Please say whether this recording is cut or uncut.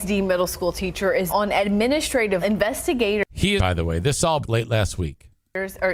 cut